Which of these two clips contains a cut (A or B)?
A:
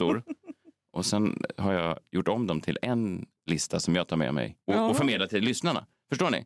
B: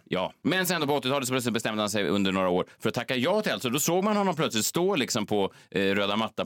A